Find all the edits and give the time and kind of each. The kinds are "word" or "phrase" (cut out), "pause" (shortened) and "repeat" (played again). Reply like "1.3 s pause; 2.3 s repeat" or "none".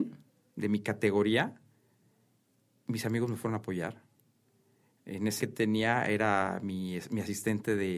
5.4 s phrase